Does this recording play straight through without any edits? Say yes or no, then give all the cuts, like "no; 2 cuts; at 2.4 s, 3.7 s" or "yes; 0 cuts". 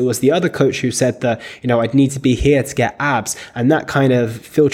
yes; 0 cuts